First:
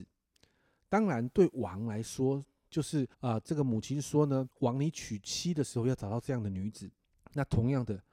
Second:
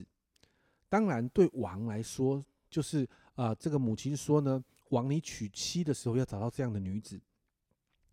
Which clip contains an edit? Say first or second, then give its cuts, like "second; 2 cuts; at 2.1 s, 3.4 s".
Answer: first; 3 cuts; at 3.1 s, 4.5 s, 7.0 s